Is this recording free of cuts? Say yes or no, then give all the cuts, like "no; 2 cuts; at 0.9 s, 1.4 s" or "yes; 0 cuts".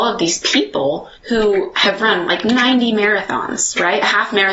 no; 1 cut; at 1.2 s